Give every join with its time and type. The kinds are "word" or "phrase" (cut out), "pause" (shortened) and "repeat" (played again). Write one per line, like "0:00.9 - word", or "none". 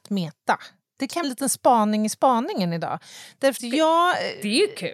0:01.2 - word
0:03.6 - word